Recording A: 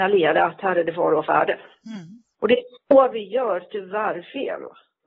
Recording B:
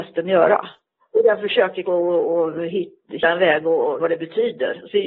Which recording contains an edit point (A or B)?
B